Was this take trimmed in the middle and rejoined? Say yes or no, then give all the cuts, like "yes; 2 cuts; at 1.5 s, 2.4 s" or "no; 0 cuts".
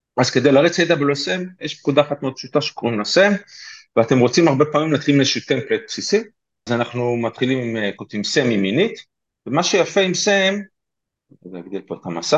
yes; 1 cut; at 6.7 s